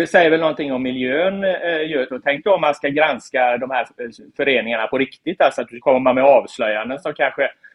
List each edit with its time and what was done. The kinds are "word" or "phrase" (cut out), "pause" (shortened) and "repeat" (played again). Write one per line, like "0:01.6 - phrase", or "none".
0:02.1 - word
0:05.8 - word